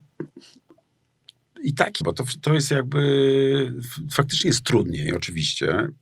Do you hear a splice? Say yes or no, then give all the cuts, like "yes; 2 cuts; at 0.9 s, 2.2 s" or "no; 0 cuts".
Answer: yes; 1 cut; at 2.0 s